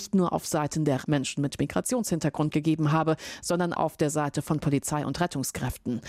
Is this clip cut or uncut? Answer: cut